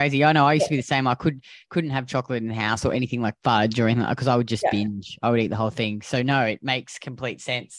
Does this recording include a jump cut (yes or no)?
no